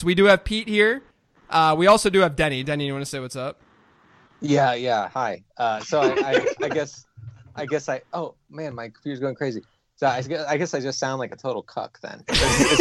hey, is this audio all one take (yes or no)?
yes